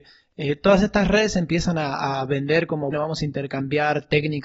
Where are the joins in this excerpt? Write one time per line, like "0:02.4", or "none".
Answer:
0:02.9